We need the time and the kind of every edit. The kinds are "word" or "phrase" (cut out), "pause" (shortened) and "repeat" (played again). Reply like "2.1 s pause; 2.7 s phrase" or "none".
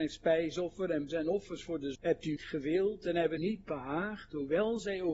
1.1 s word; 1.9 s word; 2.4 s word; 3.4 s word